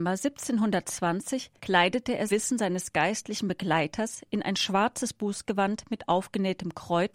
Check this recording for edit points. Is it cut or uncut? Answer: cut